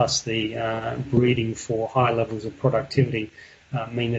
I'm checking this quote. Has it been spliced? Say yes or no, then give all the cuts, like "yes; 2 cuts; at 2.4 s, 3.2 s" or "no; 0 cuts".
no; 0 cuts